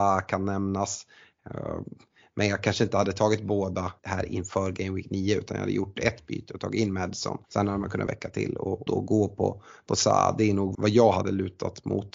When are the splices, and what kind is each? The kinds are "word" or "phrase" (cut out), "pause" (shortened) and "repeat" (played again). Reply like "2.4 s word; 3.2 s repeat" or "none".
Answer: 4.0 s pause; 7.4 s pause; 8.1 s phrase; 8.9 s word; 10.7 s word